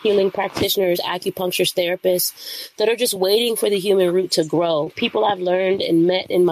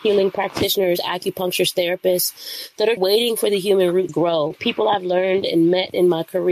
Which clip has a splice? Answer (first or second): second